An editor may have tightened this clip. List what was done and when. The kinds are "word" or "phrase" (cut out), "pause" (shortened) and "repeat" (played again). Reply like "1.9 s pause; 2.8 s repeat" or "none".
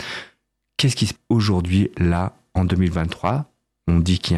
1.2 s word